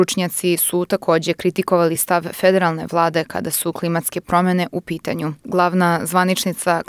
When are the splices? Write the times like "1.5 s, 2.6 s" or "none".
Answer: none